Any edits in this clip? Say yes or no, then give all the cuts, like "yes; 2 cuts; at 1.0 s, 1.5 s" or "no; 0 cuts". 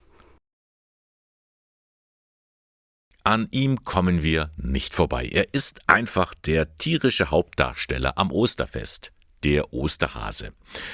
no; 0 cuts